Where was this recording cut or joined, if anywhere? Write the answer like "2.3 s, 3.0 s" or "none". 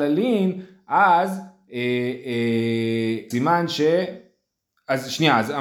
3.3 s